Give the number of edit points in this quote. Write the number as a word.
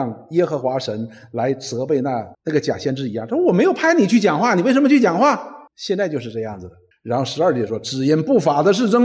three